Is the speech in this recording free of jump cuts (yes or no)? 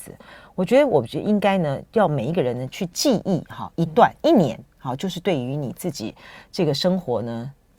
yes